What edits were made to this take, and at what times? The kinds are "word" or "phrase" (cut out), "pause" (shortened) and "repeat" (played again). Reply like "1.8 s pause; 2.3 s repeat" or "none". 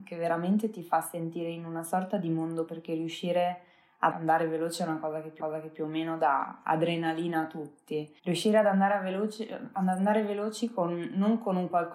2.7 s word; 4.1 s word; 5.4 s repeat; 8.2 s pause